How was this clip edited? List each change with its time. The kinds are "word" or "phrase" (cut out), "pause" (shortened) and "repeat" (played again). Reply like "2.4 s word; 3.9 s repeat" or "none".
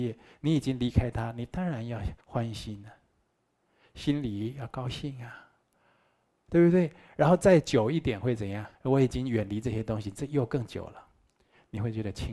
2.2 s pause; 8.8 s pause